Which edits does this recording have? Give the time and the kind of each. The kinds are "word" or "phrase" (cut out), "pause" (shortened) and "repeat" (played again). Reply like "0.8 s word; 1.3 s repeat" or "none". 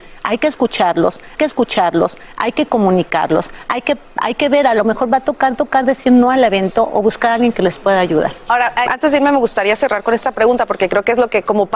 1.4 s repeat; 5.5 s repeat; 8.9 s word